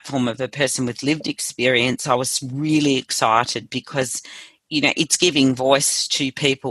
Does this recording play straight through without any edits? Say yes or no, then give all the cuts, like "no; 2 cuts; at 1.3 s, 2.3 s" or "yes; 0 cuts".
yes; 0 cuts